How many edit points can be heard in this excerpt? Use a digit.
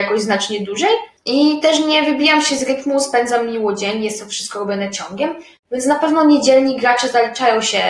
0